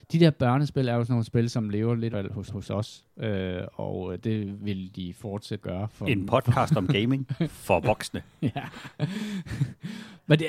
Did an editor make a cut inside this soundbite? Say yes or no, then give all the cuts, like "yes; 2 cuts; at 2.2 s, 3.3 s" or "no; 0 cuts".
yes; 3 cuts; at 2.1 s, 2.5 s, 5.6 s